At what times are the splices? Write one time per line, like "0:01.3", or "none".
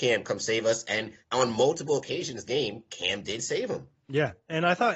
0:01.2
0:02.4
0:04.0